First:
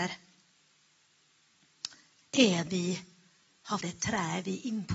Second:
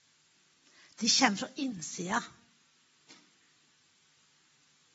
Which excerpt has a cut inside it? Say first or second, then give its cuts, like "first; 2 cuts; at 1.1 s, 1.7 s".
first; 2 cuts; at 2.7 s, 3.8 s